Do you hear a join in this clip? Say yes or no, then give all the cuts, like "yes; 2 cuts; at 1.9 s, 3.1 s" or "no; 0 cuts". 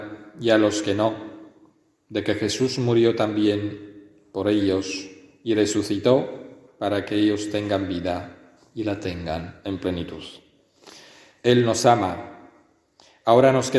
no; 0 cuts